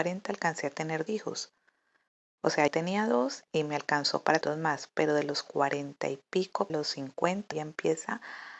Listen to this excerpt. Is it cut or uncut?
cut